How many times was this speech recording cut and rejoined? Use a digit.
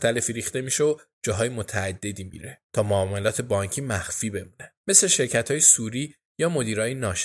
1